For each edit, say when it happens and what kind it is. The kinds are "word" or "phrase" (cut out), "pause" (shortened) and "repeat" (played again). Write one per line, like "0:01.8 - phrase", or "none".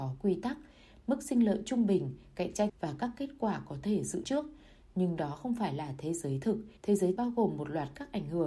0:02.7 - phrase
0:04.2 - word
0:06.8 - pause
0:07.2 - word